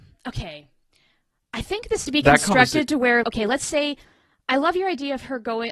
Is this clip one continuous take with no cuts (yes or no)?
no